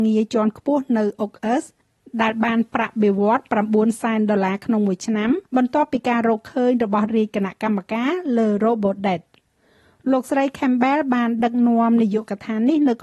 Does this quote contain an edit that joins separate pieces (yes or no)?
yes